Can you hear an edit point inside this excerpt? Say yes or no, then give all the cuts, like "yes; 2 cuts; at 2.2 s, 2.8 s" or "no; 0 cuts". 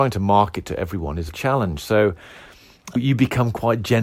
yes; 2 cuts; at 1.3 s, 3.0 s